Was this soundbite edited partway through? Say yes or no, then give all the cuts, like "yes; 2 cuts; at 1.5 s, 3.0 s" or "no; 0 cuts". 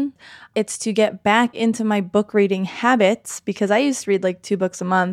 no; 0 cuts